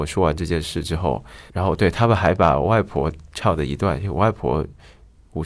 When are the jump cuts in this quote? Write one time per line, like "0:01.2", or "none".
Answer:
0:01.5